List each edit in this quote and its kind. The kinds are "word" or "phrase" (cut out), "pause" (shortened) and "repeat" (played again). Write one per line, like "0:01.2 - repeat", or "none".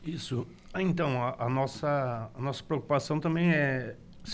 none